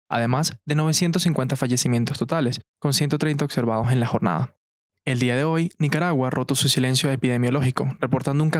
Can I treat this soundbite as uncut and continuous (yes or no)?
yes